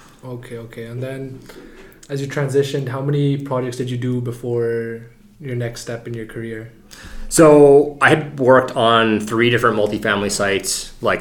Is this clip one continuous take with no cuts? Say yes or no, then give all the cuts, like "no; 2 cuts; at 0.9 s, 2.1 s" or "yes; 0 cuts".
yes; 0 cuts